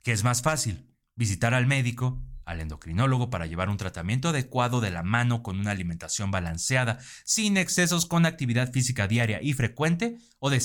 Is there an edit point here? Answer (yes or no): no